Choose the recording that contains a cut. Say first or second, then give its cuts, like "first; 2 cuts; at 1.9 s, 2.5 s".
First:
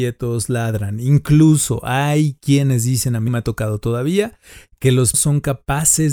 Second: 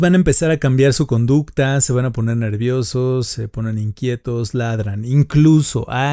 first; 2 cuts; at 3.3 s, 5.1 s